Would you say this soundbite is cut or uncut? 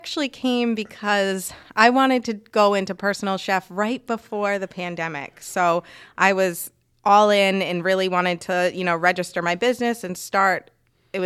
uncut